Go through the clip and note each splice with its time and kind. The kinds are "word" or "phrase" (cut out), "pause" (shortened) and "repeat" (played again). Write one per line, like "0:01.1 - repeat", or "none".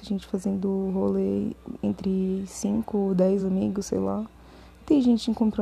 none